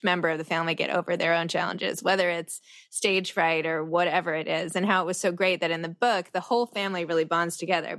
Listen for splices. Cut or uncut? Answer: uncut